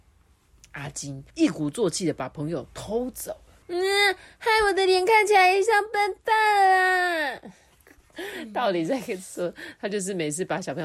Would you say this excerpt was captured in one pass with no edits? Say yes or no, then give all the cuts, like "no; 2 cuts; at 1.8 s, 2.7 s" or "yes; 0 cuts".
no; 2 cuts; at 1.3 s, 3.6 s